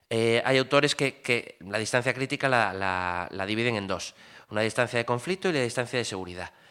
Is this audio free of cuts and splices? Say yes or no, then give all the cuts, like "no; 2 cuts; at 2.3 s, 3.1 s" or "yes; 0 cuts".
yes; 0 cuts